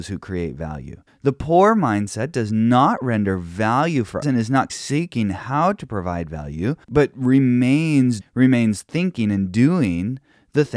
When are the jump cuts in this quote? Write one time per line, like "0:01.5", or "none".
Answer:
0:01.1
0:04.2
0:04.7
0:06.8
0:08.2